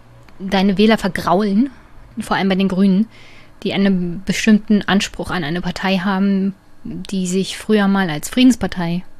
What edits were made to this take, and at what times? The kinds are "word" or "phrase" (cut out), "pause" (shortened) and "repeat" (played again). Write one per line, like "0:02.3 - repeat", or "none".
0:02.1 - pause

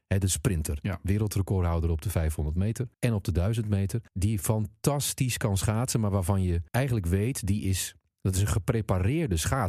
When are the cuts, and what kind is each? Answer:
0:02.9 - pause
0:04.1 - pause
0:06.7 - pause

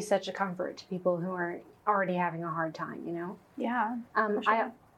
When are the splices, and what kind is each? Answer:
0:04.1 - pause

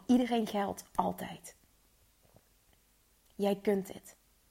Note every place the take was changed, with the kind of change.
none

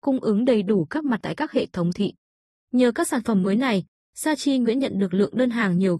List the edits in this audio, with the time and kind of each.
0:01.2 - word
0:01.9 - word

